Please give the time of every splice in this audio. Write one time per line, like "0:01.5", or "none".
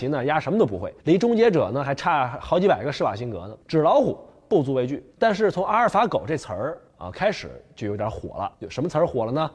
0:01.0
0:03.6
0:05.1
0:06.9
0:08.5